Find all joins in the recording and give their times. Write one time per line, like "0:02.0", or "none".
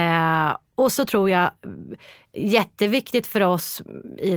0:00.9